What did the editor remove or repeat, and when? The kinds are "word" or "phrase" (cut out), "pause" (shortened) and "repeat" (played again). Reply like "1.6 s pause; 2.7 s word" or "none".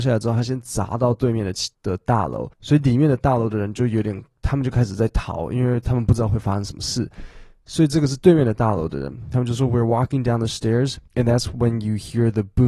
1.7 s pause; 2.5 s pause; 11.1 s pause

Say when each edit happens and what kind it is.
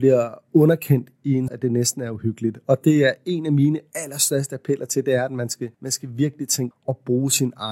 1.5 s phrase; 5.7 s pause; 6.7 s word

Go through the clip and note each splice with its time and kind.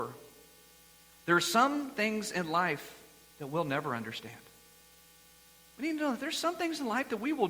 none

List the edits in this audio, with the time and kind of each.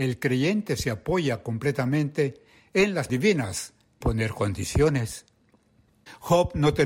3.1 s word; 4.0 s word

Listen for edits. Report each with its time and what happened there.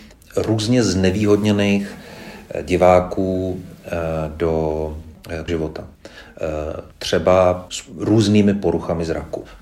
5.5 s word; 7.7 s word

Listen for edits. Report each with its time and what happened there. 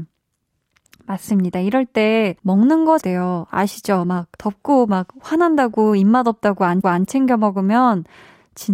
2.4 s pause; 3.0 s phrase; 4.4 s pause; 6.8 s repeat

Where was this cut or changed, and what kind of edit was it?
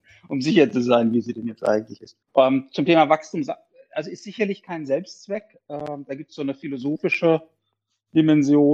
2.2 s pause

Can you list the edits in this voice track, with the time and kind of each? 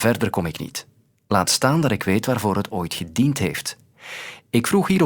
none

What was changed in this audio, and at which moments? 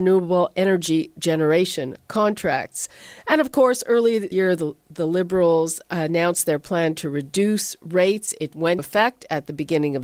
4.3 s phrase; 8.8 s word

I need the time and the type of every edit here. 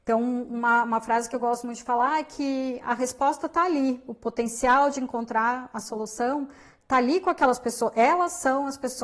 none

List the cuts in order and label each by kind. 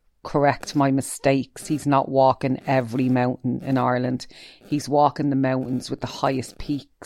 none

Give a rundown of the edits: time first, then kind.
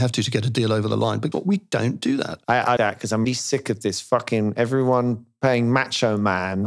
1.3 s word; 2.4 s pause; 2.8 s word; 3.2 s word

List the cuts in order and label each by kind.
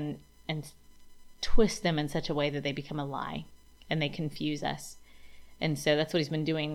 none

